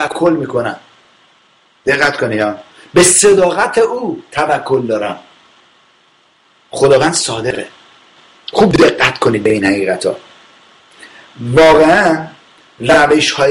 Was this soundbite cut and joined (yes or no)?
no